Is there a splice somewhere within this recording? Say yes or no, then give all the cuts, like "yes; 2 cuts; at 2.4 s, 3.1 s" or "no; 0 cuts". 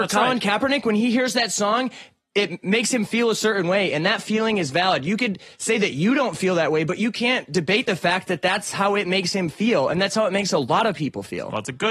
no; 0 cuts